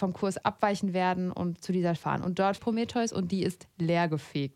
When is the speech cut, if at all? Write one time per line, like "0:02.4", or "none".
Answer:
0:02.0
0:02.6

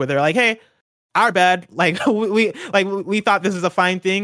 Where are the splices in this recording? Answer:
none

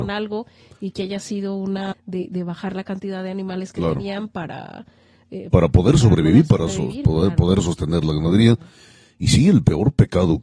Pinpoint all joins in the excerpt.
0:01.9

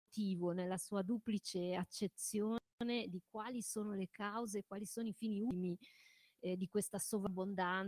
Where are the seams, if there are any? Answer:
0:02.7

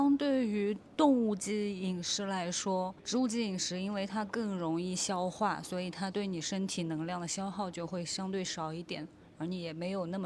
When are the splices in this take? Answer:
0:03.0

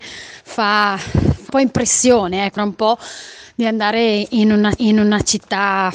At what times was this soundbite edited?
0:01.5
0:02.6
0:04.8

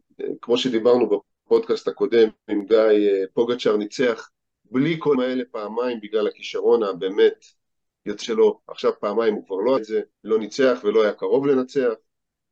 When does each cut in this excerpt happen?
0:05.1
0:08.2
0:09.8
0:10.1

